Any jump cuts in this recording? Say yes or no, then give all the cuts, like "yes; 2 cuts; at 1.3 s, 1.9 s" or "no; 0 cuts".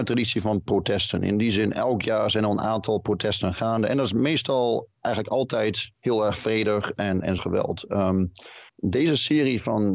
yes; 3 cuts; at 6.0 s, 7.4 s, 8.7 s